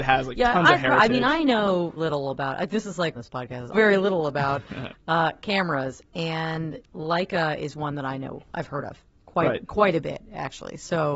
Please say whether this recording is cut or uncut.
cut